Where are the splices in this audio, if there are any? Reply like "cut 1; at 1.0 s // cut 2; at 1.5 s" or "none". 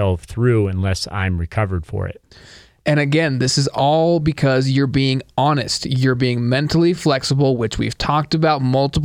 none